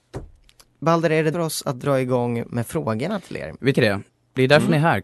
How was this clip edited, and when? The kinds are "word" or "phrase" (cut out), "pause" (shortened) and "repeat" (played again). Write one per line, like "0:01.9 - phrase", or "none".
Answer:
0:01.3 - word
0:02.5 - word
0:03.7 - word

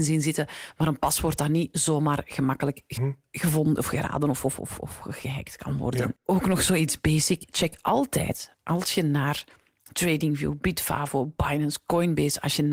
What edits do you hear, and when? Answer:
0:03.0 - word

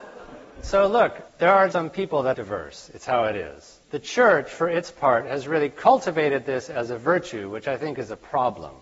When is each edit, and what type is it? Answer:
0:01.3 - pause
0:01.7 - word
0:02.3 - phrase
0:03.8 - pause

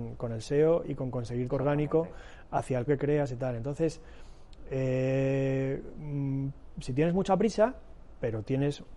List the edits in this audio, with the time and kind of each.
0:01.5 - word
0:02.9 - word

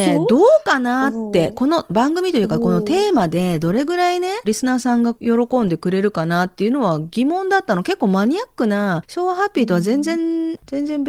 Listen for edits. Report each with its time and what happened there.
0:04.4 - phrase

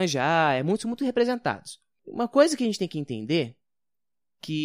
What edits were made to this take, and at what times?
none

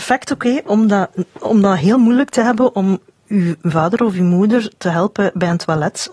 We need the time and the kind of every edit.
none

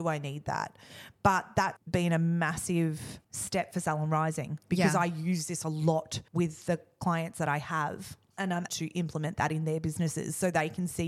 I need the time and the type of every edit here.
0:01.8 - word
0:03.2 - pause
0:06.3 - pause
0:08.7 - word

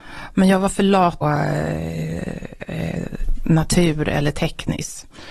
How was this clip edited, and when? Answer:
0:01.2 - phrase

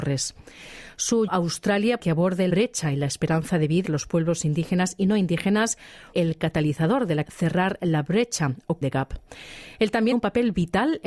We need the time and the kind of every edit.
0:01.3 - word
0:02.0 - word
0:02.5 - word
0:03.8 - word
0:06.1 - word
0:07.2 - word
0:08.8 - word
0:10.1 - word

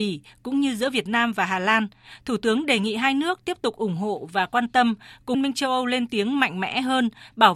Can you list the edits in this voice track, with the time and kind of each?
0:05.3 - word

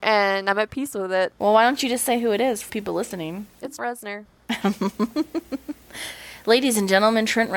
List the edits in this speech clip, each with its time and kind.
0:02.7 - word
0:03.8 - word

